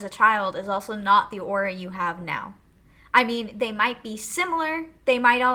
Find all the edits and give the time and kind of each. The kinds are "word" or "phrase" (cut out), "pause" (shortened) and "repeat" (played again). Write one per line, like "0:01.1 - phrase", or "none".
none